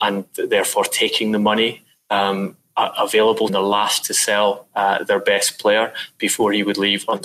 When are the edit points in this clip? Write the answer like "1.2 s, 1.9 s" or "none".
3.5 s, 4.0 s